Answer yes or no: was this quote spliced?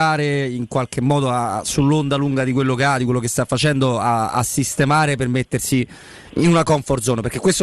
yes